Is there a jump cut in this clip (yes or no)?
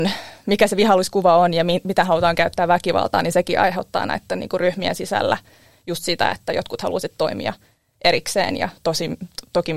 no